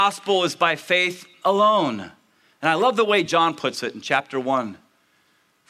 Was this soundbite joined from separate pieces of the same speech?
no; 0 cuts

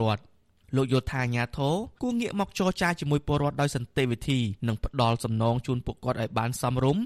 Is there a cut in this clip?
yes; 2 cuts; at 2.0 s, 4.6 s

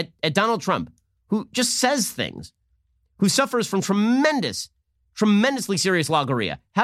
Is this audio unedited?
yes; 0 cuts

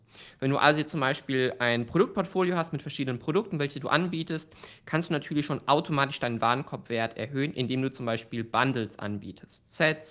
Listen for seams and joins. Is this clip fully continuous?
yes; 0 cuts

